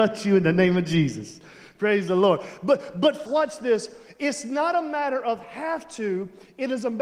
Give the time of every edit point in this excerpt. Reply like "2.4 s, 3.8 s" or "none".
3.3 s